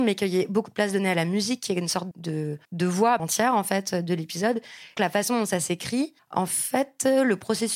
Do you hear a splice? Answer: yes; 5 cuts; at 2.1 s, 2.6 s, 3.2 s, 5.0 s, 6.2 s

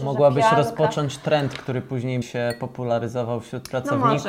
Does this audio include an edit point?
yes; 1 cut; at 2.2 s

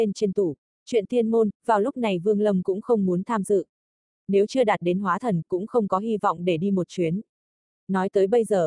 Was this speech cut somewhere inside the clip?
no; 0 cuts

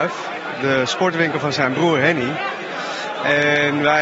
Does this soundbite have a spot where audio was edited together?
no; 0 cuts

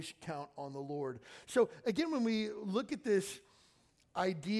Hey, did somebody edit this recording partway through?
no; 0 cuts

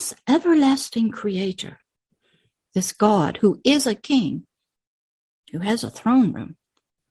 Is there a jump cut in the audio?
no; 0 cuts

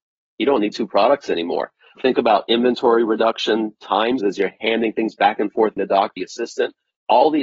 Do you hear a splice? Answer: yes; 4 cuts; at 2.0 s, 4.2 s, 5.8 s, 6.2 s

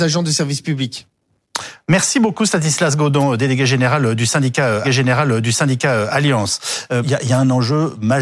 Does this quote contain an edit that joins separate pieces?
yes; 2 cuts; at 4.8 s, 7.0 s

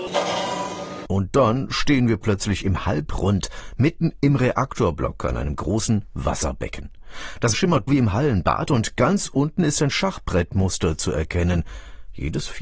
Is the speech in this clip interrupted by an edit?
yes; 2 cuts; at 7.5 s, 7.9 s

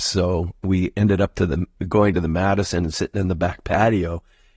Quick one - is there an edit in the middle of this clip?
no; 0 cuts

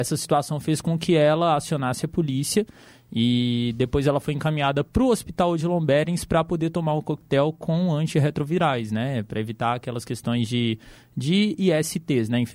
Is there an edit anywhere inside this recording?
no; 0 cuts

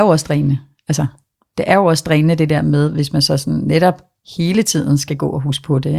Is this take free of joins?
yes; 0 cuts

